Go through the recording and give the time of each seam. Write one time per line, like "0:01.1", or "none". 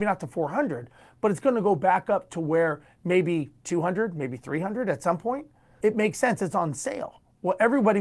0:05.8